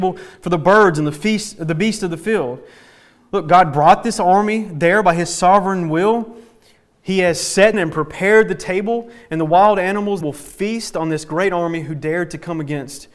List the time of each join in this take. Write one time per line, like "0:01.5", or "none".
0:07.7
0:10.2